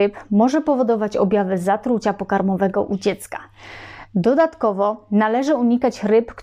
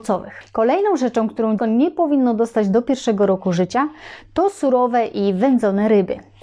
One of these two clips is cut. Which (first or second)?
second